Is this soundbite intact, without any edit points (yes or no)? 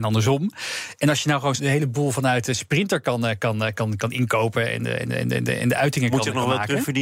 no